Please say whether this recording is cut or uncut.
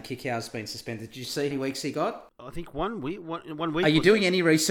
cut